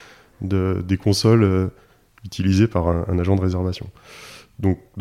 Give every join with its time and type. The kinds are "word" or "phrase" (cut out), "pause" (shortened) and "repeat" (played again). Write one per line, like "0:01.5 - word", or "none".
none